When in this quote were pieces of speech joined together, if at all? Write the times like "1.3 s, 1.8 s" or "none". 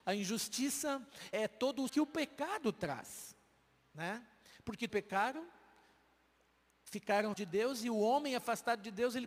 1.3 s, 1.9 s, 4.9 s, 7.3 s